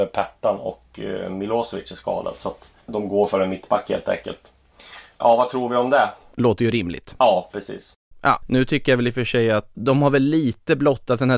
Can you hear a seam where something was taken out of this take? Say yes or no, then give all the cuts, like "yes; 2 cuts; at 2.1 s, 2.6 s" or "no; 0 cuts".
yes; 2 cuts; at 2.8 s, 9.7 s